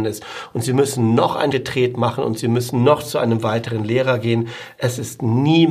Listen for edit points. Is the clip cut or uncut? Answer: cut